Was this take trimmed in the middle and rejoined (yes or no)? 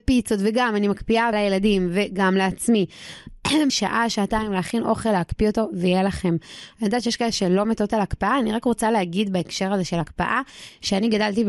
yes